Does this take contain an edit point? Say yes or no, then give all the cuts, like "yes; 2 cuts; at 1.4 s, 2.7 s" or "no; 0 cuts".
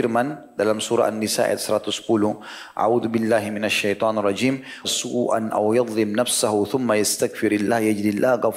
yes; 1 cut; at 4.8 s